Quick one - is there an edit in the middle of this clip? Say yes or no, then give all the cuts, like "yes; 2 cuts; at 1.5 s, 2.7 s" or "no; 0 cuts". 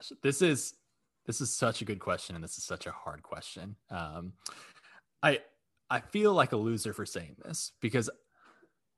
no; 0 cuts